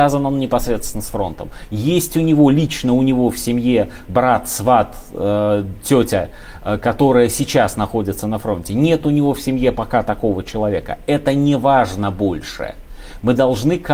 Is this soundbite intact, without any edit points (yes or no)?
yes